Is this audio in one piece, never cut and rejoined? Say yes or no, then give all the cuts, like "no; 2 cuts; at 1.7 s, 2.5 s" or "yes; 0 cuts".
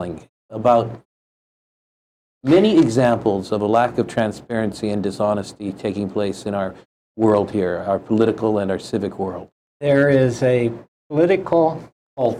yes; 0 cuts